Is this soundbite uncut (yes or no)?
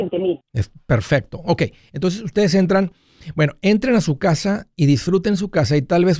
yes